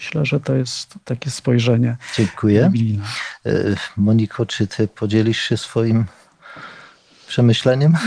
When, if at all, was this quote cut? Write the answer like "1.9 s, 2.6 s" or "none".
none